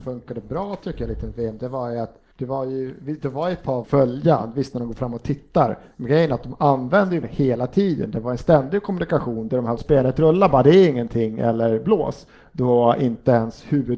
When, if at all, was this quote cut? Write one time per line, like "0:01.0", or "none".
0:02.3
0:03.8
0:07.2
0:09.8